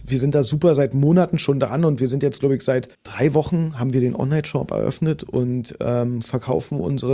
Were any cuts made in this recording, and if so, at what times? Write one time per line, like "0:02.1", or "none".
0:02.9